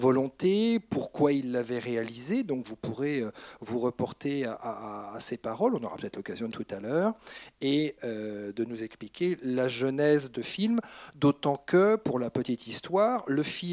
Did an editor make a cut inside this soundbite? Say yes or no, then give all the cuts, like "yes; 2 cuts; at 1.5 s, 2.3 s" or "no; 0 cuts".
yes; 2 cuts; at 6.5 s, 10.4 s